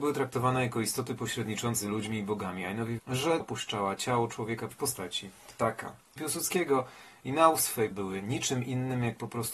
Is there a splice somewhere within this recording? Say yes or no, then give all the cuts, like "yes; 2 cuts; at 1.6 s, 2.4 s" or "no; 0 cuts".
yes; 6 cuts; at 1.8 s, 3.0 s, 3.4 s, 4.7 s, 6.2 s, 7.9 s